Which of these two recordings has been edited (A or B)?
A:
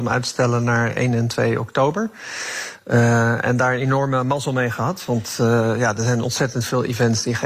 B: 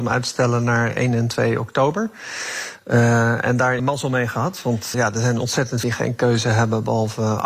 B